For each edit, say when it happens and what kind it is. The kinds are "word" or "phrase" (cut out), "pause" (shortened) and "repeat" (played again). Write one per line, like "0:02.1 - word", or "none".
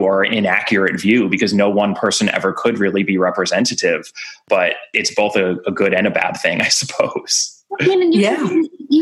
none